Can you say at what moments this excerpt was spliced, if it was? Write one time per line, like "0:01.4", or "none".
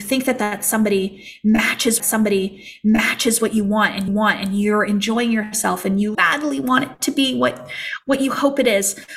0:02.0
0:04.1
0:06.1